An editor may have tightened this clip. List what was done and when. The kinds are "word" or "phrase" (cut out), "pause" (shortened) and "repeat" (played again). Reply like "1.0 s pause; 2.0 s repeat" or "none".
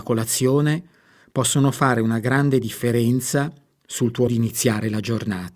4.3 s word